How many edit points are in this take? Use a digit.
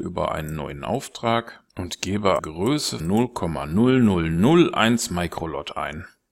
3